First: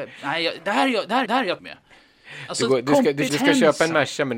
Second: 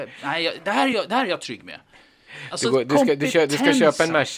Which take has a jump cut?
first; 3 cuts; at 1.3 s, 1.6 s, 3.3 s

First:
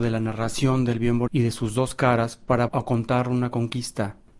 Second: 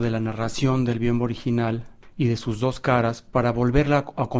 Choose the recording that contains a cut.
first; 2 cuts; at 1.3 s, 2.7 s

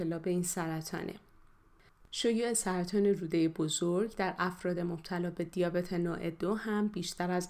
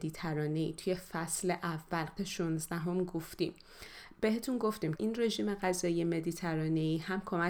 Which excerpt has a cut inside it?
second; 2 cuts; at 2.2 s, 5.0 s

